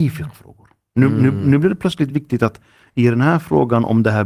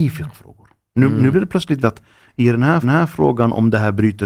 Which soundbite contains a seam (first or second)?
second